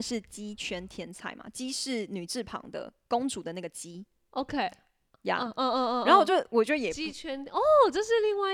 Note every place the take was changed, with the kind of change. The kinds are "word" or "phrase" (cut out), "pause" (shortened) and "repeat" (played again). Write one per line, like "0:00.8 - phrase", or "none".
none